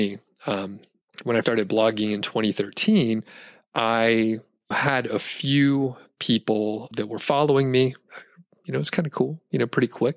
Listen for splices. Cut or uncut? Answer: cut